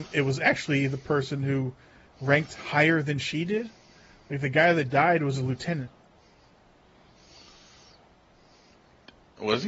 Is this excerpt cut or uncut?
uncut